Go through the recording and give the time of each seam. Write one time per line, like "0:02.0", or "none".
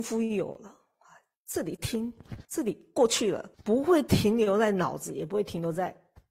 0:02.4
0:03.5